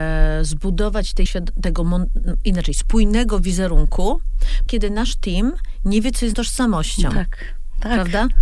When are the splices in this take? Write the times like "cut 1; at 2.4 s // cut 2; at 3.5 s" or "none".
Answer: cut 1; at 1.3 s // cut 2; at 4.7 s // cut 3; at 6.3 s